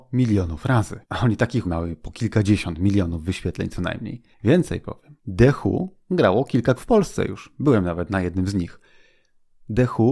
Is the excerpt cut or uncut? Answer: cut